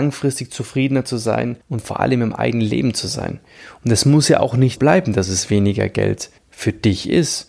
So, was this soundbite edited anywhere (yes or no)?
yes